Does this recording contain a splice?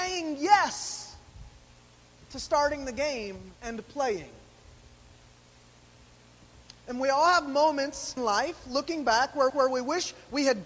yes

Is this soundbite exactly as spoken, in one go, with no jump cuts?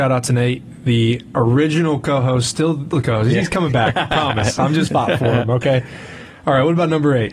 no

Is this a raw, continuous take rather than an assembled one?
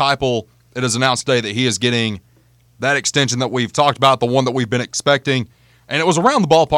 yes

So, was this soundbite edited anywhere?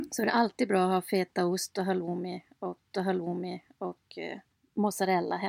yes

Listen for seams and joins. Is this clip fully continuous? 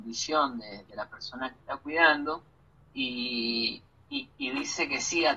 yes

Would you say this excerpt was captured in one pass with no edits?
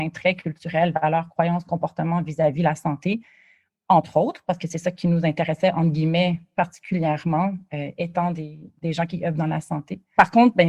yes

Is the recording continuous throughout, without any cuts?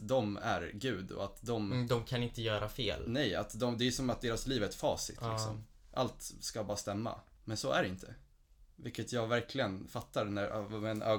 yes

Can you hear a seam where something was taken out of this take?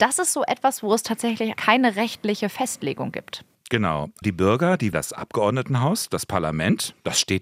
yes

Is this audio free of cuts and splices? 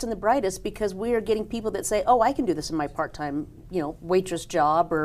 yes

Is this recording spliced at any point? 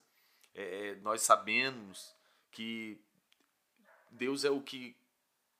no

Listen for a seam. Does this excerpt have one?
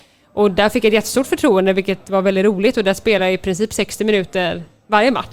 no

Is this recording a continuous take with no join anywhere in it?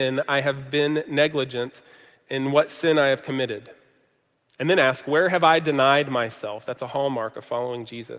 yes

